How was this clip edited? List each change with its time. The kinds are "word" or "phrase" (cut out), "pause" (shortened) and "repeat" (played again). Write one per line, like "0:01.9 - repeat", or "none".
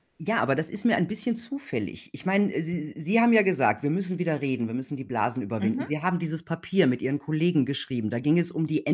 none

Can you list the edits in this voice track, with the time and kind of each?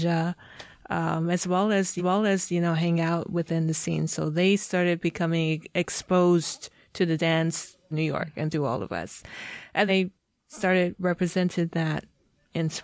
0:02.0 - repeat
0:07.9 - word
0:09.9 - word

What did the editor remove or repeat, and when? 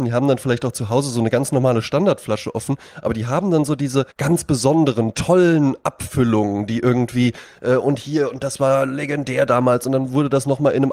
0:04.1 - pause

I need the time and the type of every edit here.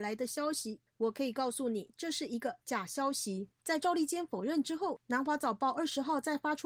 0:03.6 - pause

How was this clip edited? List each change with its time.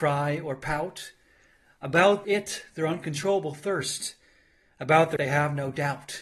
0:02.2 - word
0:05.2 - word

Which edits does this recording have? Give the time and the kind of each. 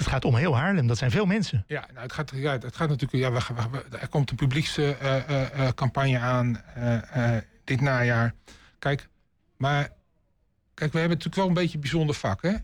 none

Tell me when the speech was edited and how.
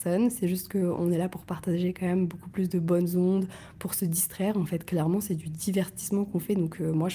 none

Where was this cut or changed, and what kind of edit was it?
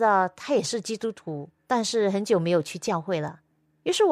0:01.6 - pause

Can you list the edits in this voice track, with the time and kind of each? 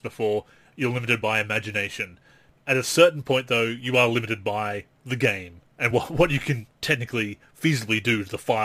none

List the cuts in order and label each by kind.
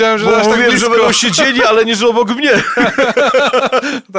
none

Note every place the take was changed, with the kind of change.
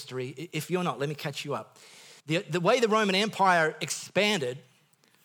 0:02.2 - pause

